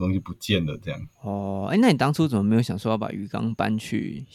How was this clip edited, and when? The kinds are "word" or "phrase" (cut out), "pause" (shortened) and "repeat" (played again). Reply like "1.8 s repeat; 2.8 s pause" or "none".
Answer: 1.1 s pause